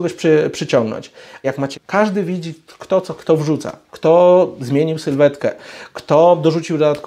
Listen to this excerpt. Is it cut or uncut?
cut